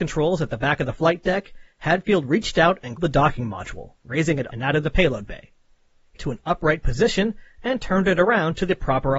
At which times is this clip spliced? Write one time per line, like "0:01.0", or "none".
0:03.0
0:04.0
0:04.5
0:06.2